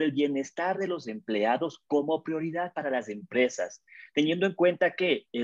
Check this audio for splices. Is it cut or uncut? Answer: uncut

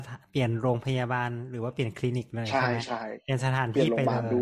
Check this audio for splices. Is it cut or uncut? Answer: uncut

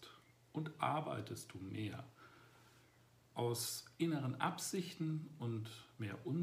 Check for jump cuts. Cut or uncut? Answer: uncut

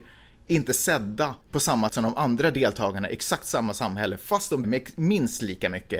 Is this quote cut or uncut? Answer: cut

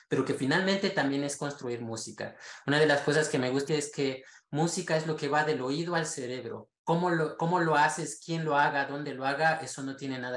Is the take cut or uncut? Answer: cut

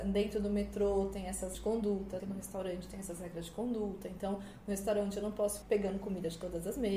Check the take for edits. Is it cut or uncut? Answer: cut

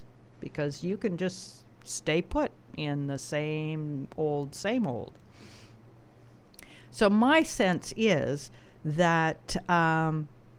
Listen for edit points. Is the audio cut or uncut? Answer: uncut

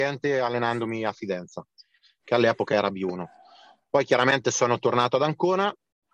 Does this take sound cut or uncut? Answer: uncut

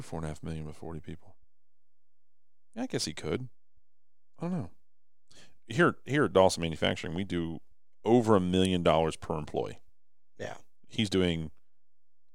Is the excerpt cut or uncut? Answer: uncut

